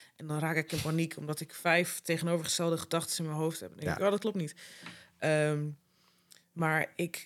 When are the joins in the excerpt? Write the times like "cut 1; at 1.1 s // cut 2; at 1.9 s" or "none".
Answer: none